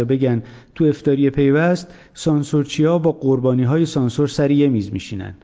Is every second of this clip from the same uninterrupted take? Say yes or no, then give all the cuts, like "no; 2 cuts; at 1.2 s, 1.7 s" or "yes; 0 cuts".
yes; 0 cuts